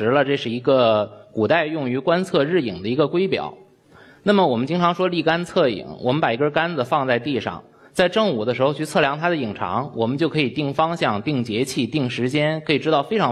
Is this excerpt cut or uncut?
uncut